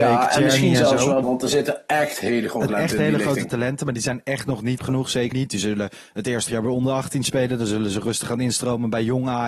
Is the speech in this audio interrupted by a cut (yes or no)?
yes